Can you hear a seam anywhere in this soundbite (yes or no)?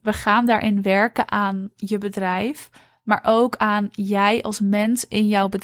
no